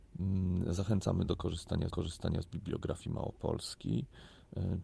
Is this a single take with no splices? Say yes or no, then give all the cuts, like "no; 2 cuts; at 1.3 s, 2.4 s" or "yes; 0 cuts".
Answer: no; 1 cut; at 1.9 s